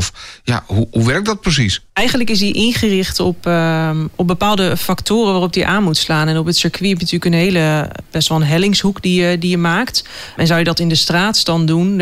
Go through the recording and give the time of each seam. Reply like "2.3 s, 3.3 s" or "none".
1.9 s